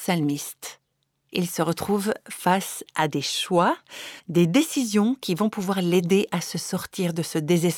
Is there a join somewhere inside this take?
yes; 1 cut; at 0.9 s

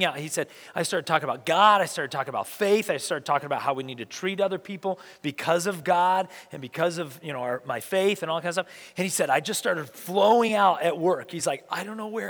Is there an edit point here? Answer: no; 0 cuts

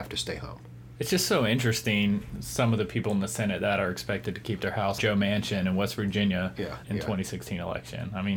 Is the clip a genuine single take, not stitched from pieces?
no; 2 cuts; at 5.0 s, 6.8 s

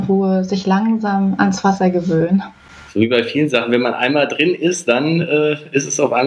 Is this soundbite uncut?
yes; 0 cuts

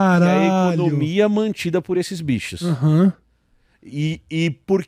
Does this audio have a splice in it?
no; 0 cuts

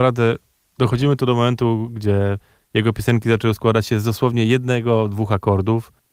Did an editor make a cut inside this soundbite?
no; 0 cuts

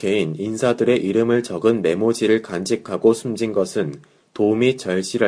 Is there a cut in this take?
no; 0 cuts

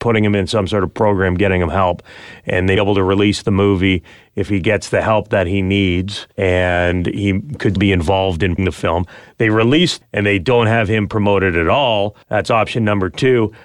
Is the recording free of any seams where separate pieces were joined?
no; 6 cuts; at 2.8 s, 6.3 s, 7.8 s, 8.6 s, 10.0 s, 12.2 s

